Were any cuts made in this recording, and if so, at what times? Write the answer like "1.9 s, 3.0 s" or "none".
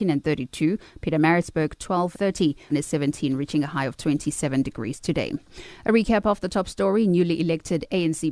2.1 s, 2.7 s